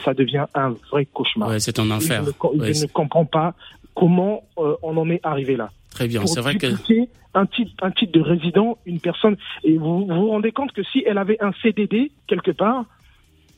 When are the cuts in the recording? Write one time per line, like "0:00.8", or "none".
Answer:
0:07.8
0:12.2